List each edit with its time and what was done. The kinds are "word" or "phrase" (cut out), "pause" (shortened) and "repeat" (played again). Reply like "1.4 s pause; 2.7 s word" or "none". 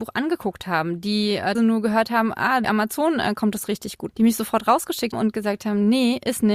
1.5 s word; 2.6 s word; 4.1 s word; 5.1 s word